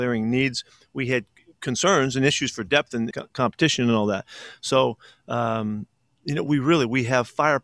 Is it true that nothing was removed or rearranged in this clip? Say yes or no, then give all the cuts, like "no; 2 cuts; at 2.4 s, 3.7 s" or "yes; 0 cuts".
no; 1 cut; at 3.1 s